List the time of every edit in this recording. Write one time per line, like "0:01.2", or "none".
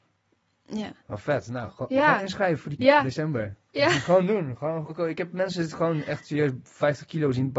0:01.0
0:02.8
0:04.9